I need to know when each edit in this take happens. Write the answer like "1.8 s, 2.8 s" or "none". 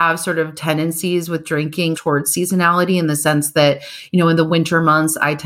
1.9 s